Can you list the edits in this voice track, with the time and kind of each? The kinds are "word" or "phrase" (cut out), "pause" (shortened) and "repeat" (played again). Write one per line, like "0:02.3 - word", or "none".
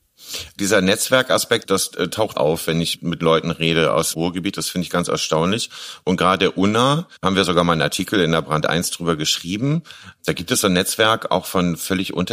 0:02.3 - word
0:04.1 - word
0:07.2 - pause